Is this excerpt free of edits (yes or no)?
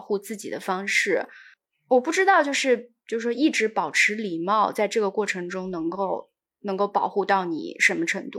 yes